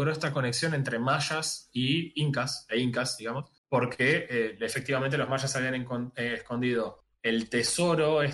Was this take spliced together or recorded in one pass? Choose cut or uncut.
cut